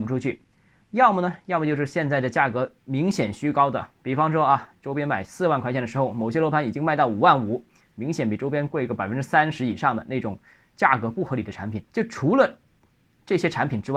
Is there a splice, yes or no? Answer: yes